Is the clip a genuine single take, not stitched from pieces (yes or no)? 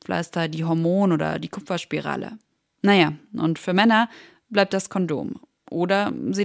yes